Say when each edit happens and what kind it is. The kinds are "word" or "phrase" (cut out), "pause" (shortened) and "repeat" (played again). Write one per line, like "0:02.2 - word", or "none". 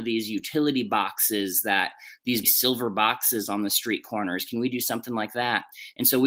0:02.4 - word